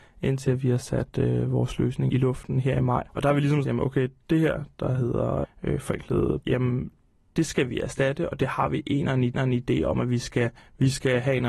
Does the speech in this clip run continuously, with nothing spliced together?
no; 8 cuts; at 2.1 s, 3.1 s, 3.6 s, 5.4 s, 6.4 s, 7.3 s, 9.3 s, 10.6 s

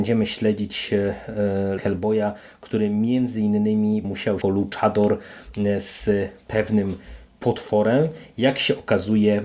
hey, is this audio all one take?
no; 3 cuts; at 1.8 s, 4.0 s, 4.4 s

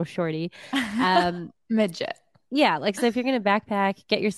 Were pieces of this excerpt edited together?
no; 0 cuts

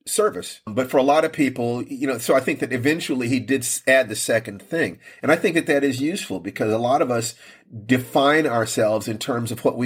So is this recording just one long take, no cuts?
yes; 0 cuts

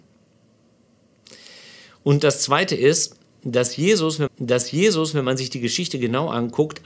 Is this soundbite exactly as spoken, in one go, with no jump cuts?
no; 1 cut; at 4.3 s

